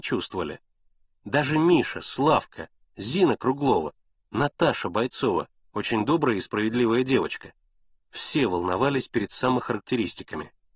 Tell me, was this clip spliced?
no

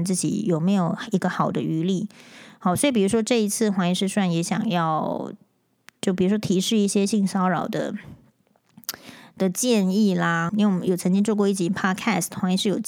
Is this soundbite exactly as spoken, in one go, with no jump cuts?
no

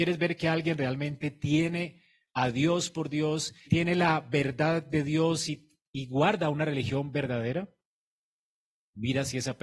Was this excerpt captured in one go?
no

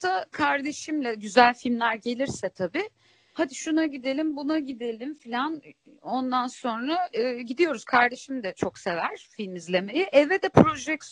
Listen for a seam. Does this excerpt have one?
no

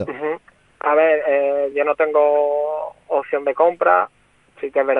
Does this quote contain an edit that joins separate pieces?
no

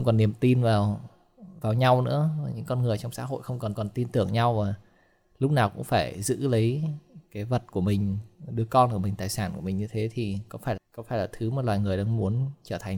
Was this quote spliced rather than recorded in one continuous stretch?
yes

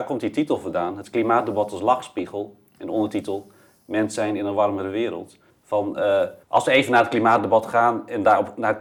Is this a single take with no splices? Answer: no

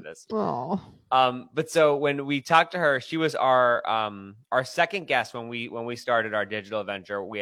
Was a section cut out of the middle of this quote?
yes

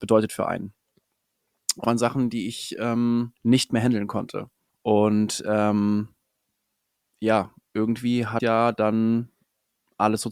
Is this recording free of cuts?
no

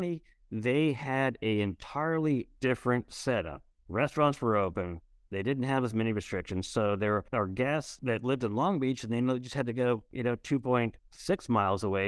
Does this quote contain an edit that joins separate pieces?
no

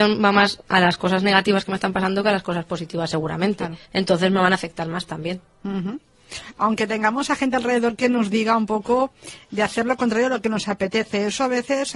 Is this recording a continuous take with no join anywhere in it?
no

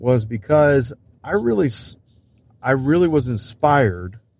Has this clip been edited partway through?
no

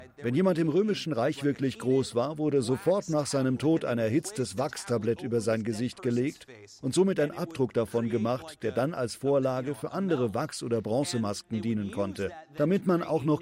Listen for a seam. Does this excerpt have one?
no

